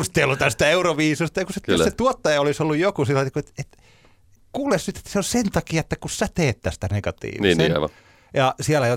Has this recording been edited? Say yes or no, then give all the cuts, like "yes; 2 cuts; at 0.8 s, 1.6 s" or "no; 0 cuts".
no; 0 cuts